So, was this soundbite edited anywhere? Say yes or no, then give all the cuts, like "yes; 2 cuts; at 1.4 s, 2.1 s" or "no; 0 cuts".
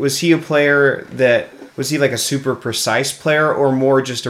yes; 1 cut; at 1.7 s